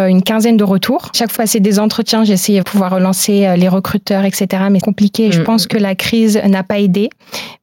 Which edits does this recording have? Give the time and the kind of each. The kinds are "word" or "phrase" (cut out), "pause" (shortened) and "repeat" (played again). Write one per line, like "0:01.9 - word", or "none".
0:01.4 - phrase
0:02.6 - word
0:04.8 - phrase